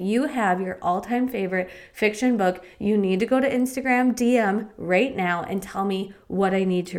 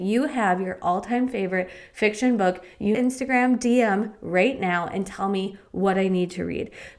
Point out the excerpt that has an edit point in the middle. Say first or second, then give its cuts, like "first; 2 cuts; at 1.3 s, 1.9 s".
second; 1 cut; at 2.9 s